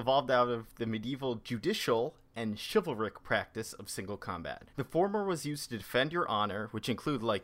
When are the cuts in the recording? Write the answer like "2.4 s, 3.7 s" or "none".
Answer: 4.7 s